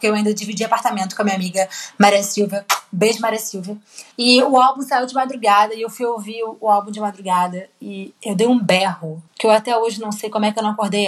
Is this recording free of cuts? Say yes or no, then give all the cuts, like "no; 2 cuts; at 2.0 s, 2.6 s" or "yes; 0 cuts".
no; 3 cuts; at 4.1 s, 8.2 s, 9.3 s